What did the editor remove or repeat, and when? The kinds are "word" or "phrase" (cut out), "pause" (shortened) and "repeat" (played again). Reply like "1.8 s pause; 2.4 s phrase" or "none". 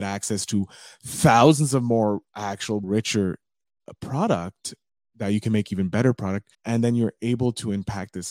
2.8 s word; 6.5 s pause